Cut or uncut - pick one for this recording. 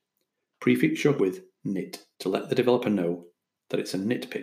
cut